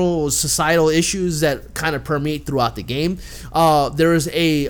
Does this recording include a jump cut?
no; 0 cuts

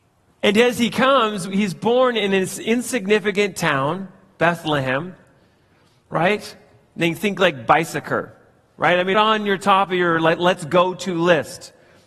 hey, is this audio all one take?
no; 1 cut; at 9.1 s

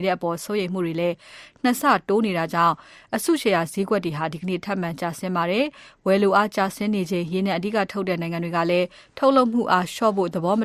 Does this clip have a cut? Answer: no; 0 cuts

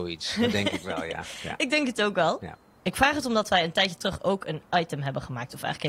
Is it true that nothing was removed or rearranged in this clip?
yes; 0 cuts

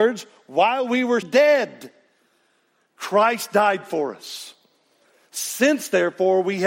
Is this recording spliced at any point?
yes; 1 cut; at 1.2 s

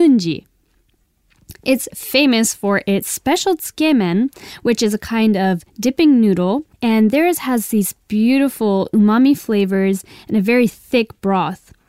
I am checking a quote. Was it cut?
yes; 1 cut; at 6.7 s

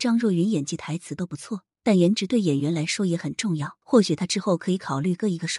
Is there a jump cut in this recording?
yes; 2 cuts; at 1.7 s, 3.8 s

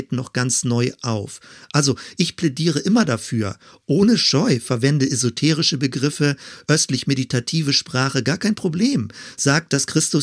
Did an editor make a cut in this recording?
no; 0 cuts

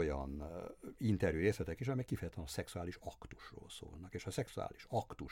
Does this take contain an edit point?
no; 0 cuts

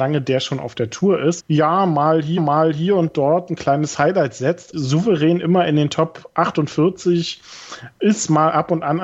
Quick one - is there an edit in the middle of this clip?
yes; 3 cuts; at 1.4 s, 2.4 s, 4.7 s

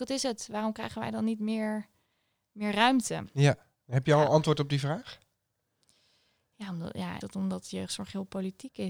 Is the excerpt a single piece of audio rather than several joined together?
no; 1 cut; at 7.2 s

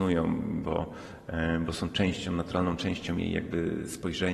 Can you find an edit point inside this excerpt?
no; 0 cuts

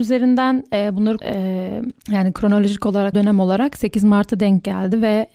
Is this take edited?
yes; 3 cuts; at 1.2 s, 2.0 s, 3.1 s

